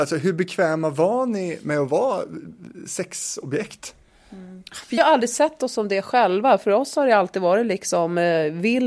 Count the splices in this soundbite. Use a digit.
1